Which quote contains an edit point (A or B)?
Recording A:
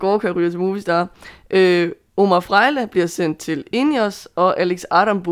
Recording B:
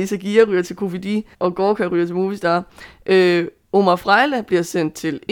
B